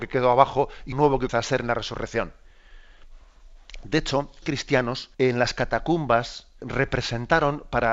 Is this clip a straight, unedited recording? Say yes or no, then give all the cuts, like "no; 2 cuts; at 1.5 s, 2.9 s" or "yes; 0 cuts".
no; 5 cuts; at 0.9 s, 1.3 s, 4.4 s, 5.1 s, 6.6 s